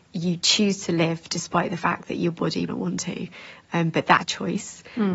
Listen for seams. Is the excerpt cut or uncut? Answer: cut